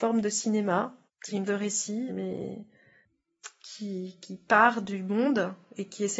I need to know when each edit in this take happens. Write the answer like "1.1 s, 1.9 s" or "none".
1.1 s, 1.5 s, 2.1 s